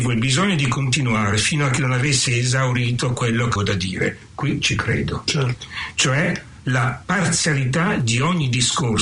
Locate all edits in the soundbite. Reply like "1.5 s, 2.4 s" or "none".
3.6 s